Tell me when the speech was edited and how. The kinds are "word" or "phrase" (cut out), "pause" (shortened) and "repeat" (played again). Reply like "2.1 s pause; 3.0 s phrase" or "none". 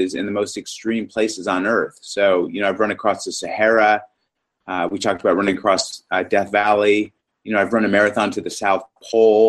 none

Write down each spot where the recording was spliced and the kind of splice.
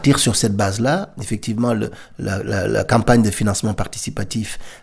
none

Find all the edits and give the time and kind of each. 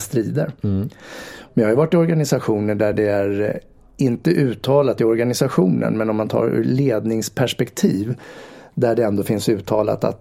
none

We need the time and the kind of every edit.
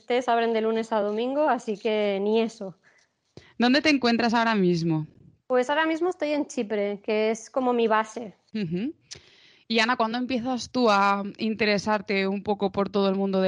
none

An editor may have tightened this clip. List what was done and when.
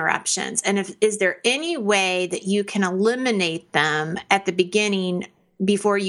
none

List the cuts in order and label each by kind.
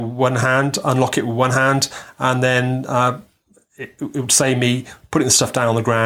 none

